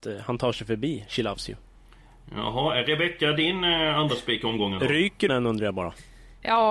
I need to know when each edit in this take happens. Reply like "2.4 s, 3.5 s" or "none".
5.3 s